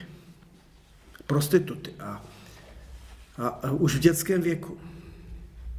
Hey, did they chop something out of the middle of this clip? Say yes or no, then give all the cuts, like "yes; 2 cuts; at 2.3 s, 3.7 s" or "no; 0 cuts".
no; 0 cuts